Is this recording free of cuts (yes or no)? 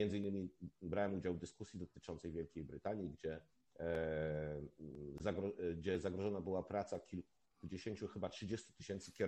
no